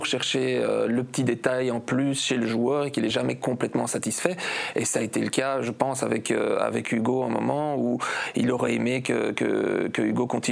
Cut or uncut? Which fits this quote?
uncut